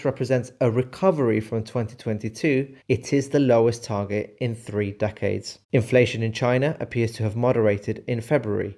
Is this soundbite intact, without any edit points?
no; 2 cuts; at 2.8 s, 5.6 s

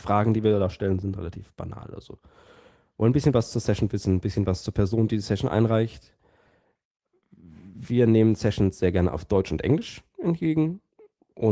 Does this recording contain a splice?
no; 0 cuts

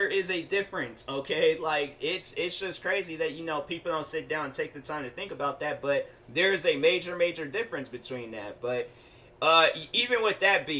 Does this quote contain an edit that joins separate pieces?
no; 0 cuts

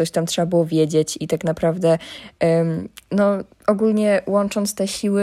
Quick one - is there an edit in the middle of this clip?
no; 0 cuts

